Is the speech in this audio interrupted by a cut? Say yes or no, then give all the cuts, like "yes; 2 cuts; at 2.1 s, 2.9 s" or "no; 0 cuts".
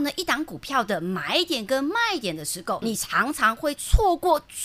yes; 1 cut; at 2.8 s